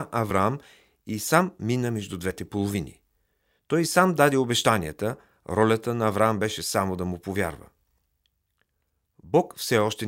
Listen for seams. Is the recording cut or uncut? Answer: uncut